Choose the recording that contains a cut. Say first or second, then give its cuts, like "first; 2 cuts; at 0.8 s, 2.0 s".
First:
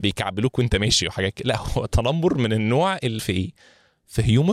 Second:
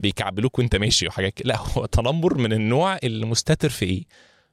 first; 1 cut; at 3.2 s